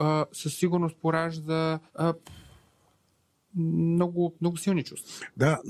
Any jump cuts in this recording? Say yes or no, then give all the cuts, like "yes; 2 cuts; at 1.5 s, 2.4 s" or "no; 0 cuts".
yes; 1 cut; at 1.9 s